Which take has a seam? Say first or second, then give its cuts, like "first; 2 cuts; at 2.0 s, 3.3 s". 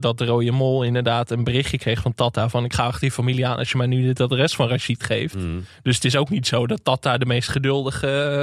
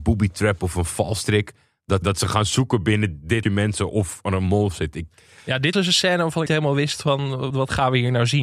second; 5 cuts; at 2.0 s, 3.4 s, 5.7 s, 6.5 s, 7.5 s